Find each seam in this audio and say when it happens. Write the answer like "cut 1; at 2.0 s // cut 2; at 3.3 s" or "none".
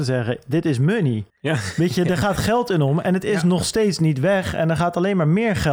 cut 1; at 1.3 s